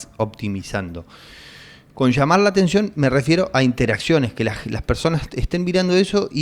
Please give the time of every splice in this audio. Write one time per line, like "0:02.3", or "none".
none